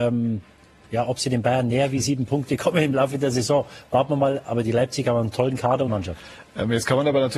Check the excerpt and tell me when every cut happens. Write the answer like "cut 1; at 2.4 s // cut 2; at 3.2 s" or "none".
cut 1; at 5.9 s

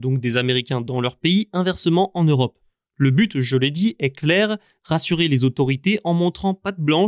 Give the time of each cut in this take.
none

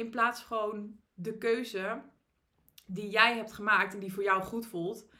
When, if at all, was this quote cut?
none

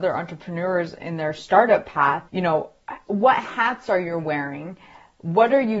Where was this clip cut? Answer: cut 1; at 2.3 s

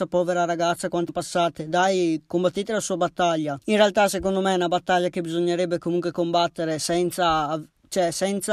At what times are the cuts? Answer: cut 1; at 1.1 s // cut 2; at 3.6 s

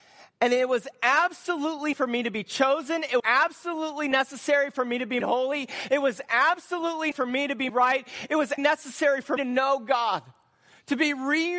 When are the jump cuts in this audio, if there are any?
cut 1; at 1.9 s // cut 2; at 3.2 s // cut 3; at 5.2 s // cut 4; at 7.1 s // cut 5; at 7.7 s // cut 6; at 8.6 s // cut 7; at 9.4 s

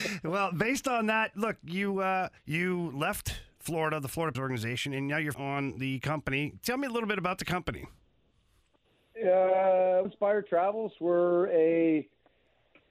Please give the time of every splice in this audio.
cut 1; at 1.3 s // cut 2; at 2.4 s // cut 3; at 4.3 s // cut 4; at 5.3 s // cut 5; at 10.0 s

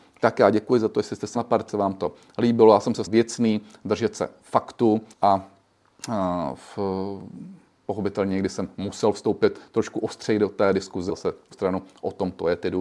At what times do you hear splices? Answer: cut 1; at 1.3 s // cut 2; at 1.7 s // cut 3; at 3.1 s // cut 4; at 5.1 s // cut 5; at 7.7 s // cut 6; at 11.1 s // cut 7; at 11.5 s

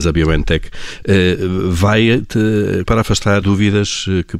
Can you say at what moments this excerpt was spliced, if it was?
cut 1; at 2.9 s // cut 2; at 3.4 s

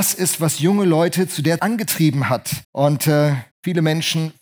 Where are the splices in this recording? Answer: cut 1; at 1.6 s // cut 2; at 2.6 s // cut 3; at 3.5 s

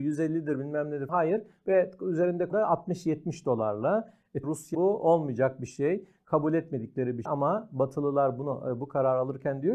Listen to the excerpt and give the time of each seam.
cut 1; at 1.1 s // cut 2; at 2.5 s // cut 3; at 4.4 s // cut 4; at 4.7 s // cut 5; at 7.3 s

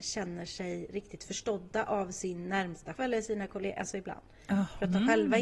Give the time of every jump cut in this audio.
cut 1; at 2.9 s

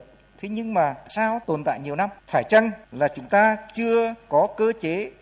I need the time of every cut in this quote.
cut 1; at 1.1 s // cut 2; at 1.4 s // cut 3; at 2.2 s // cut 4; at 2.8 s

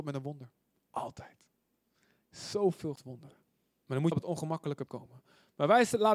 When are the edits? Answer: cut 1; at 3.0 s // cut 2; at 3.5 s // cut 3; at 4.1 s // cut 4; at 4.9 s

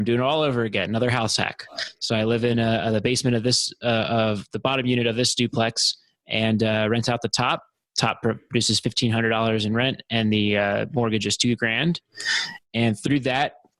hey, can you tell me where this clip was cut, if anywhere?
none

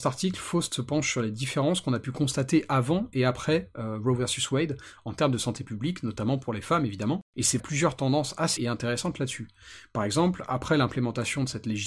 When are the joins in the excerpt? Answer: cut 1; at 7.6 s // cut 2; at 8.6 s

